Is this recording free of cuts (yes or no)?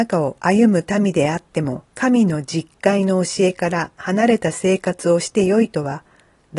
no